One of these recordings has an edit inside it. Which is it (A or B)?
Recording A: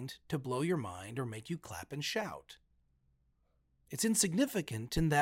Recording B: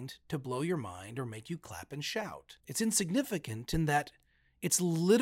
B